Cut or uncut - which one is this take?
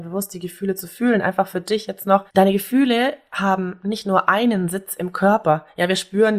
uncut